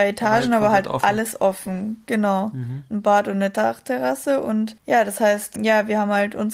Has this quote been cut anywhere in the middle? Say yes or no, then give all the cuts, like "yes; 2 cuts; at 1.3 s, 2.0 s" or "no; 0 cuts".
yes; 2 cuts; at 4.8 s, 5.6 s